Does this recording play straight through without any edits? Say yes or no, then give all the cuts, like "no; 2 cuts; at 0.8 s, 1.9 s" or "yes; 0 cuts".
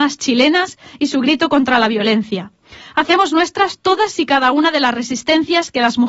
yes; 0 cuts